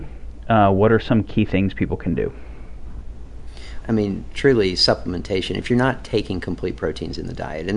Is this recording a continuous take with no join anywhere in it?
no; 1 cut; at 3.8 s

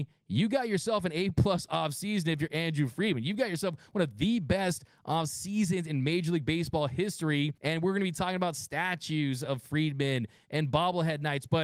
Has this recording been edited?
yes; 1 cut; at 7.6 s

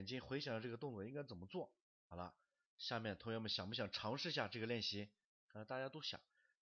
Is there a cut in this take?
no; 0 cuts

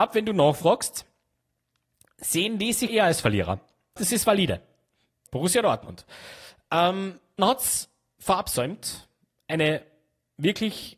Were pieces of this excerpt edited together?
yes; 4 cuts; at 2.9 s, 4.0 s, 5.3 s, 7.4 s

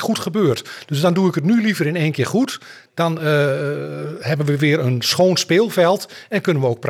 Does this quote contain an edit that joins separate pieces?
no; 0 cuts

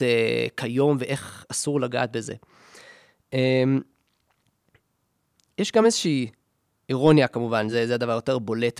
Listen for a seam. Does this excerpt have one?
no; 0 cuts

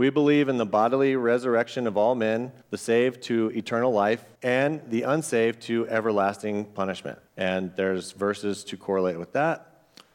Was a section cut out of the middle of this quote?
yes; 3 cuts; at 2.6 s, 4.4 s, 7.3 s

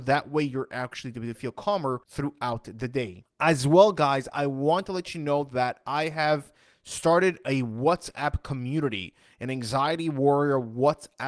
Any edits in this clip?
yes; 1 cut; at 2.0 s

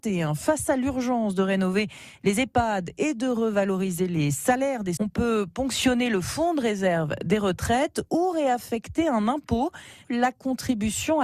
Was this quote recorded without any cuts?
no; 1 cut; at 5.0 s

